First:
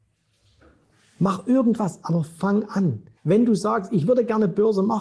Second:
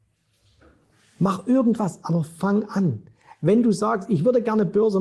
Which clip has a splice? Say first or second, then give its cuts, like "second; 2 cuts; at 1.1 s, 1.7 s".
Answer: first; 1 cut; at 3.2 s